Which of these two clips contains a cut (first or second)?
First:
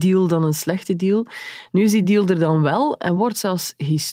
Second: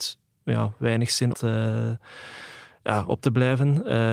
second